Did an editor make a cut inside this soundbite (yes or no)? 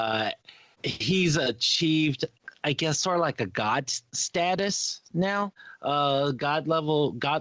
no